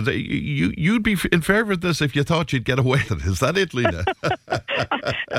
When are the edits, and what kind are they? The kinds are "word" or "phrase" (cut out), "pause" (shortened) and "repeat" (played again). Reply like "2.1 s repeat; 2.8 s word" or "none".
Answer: 3.1 s word